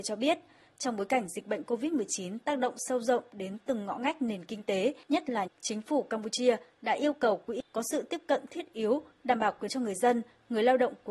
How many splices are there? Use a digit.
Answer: 3